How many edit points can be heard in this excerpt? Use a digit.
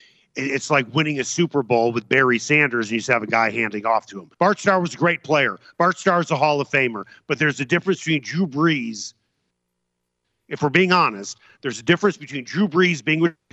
1